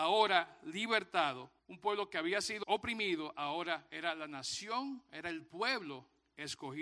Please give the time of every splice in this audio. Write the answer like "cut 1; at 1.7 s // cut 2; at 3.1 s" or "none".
cut 1; at 1.6 s // cut 2; at 2.6 s